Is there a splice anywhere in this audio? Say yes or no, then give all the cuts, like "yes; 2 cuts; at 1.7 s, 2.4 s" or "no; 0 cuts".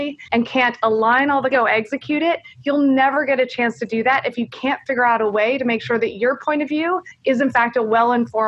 yes; 1 cut; at 1.5 s